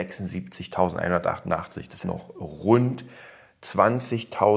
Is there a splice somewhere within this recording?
yes; 1 cut; at 2.0 s

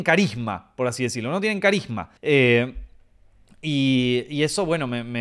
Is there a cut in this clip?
yes; 1 cut; at 2.2 s

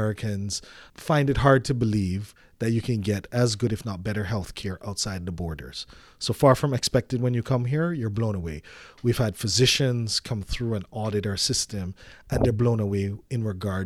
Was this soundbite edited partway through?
no; 0 cuts

